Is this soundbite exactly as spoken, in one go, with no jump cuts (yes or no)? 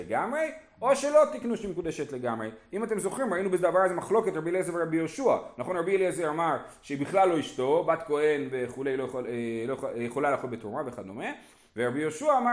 yes